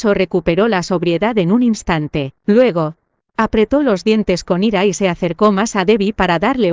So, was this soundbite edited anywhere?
yes; 1 cut; at 2.4 s

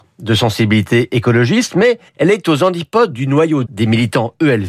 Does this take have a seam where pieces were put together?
yes; 2 cuts; at 2.1 s, 3.6 s

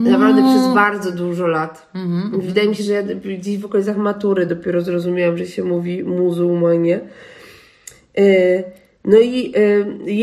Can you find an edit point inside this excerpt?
no; 0 cuts

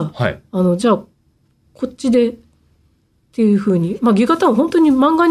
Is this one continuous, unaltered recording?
yes; 0 cuts

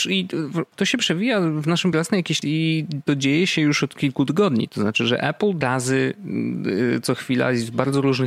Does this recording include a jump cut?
yes; 3 cuts; at 1.9 s, 2.4 s, 5.6 s

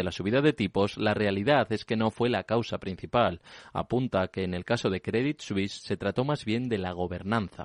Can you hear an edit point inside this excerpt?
no; 0 cuts

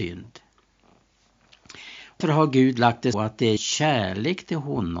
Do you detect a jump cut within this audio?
yes; 3 cuts; at 2.2 s, 3.1 s, 3.6 s

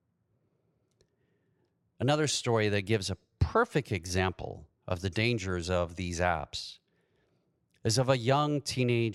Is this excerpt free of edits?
yes; 0 cuts

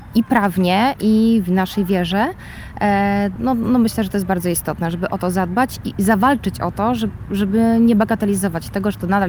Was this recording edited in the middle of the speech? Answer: yes; 1 cut; at 3.4 s

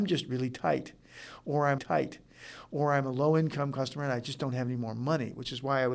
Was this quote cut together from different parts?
yes; 1 cut; at 1.8 s

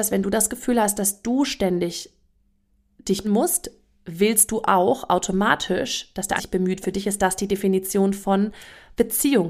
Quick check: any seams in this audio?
yes; 3 cuts; at 3.2 s, 6.4 s, 6.8 s

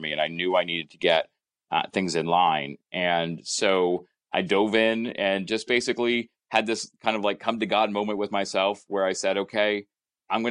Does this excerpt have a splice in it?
no; 0 cuts

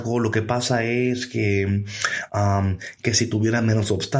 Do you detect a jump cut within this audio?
no; 0 cuts

